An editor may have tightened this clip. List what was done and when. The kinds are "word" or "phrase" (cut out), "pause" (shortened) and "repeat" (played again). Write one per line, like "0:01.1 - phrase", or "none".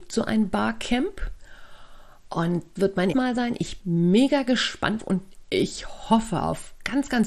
0:02.8 - word
0:03.1 - word
0:03.8 - word
0:05.0 - word